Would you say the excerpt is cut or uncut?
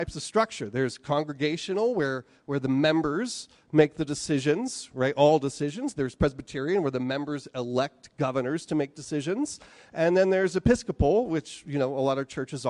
uncut